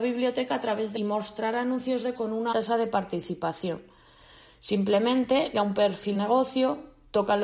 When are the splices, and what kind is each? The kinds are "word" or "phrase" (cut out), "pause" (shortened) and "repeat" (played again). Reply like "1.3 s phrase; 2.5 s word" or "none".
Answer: 1.0 s phrase; 2.1 s word; 2.5 s word; 5.5 s word; 6.1 s word